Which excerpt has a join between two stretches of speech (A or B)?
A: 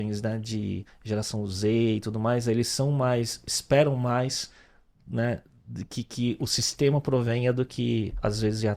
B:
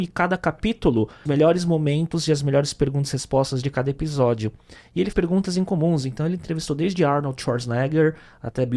B